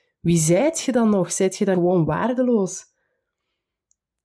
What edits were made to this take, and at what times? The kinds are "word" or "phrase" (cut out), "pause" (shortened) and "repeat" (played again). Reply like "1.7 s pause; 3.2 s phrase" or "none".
1.7 s word